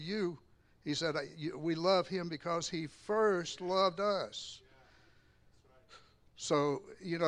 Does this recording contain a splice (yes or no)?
no